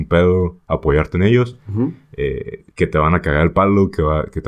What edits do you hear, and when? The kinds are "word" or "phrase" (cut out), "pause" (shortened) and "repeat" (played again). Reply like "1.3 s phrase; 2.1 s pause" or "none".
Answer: 2.7 s pause